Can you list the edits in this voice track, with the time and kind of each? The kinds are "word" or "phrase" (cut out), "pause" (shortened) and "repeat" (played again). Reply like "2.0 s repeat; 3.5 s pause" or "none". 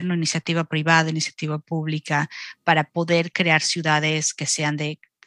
none

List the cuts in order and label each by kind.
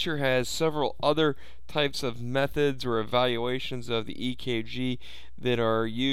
none

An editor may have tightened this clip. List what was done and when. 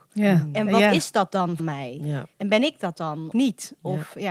1.6 s word; 2.3 s pause; 3.3 s word

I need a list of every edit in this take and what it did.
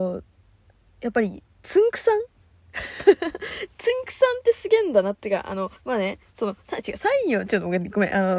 1.5 s pause; 5.8 s pause

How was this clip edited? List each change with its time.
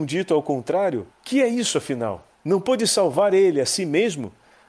1.1 s pause; 2.3 s pause

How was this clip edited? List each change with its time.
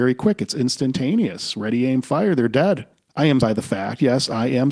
2.9 s pause; 3.4 s word

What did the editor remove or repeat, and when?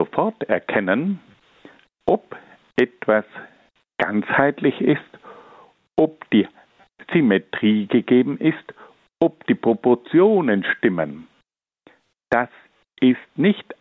none

